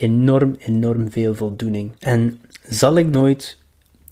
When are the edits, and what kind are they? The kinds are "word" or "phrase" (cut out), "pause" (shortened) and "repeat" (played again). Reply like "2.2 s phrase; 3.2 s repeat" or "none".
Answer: 2.0 s pause; 3.1 s word